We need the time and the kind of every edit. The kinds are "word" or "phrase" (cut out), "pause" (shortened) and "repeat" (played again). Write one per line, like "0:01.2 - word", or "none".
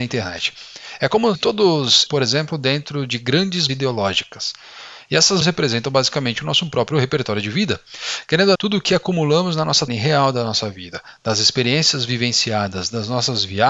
0:01.4 - word
0:02.1 - word
0:03.7 - word
0:05.4 - word
0:08.6 - word
0:09.9 - word